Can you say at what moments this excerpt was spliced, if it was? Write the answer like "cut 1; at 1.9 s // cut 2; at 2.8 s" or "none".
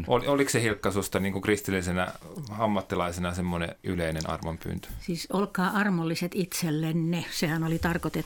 cut 1; at 3.8 s